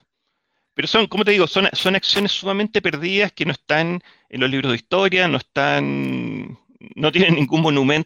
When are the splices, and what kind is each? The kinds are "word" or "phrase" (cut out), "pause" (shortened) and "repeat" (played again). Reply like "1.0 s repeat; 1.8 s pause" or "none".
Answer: none